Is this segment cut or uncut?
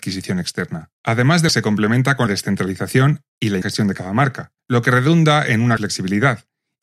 cut